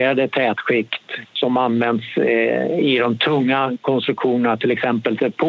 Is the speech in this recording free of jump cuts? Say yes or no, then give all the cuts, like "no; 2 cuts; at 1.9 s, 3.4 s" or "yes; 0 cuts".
yes; 0 cuts